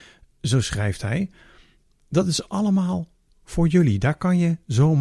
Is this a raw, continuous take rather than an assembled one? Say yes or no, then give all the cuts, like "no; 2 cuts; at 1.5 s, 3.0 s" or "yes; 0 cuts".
yes; 0 cuts